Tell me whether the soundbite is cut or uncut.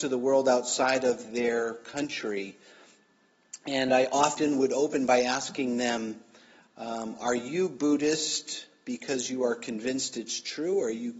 uncut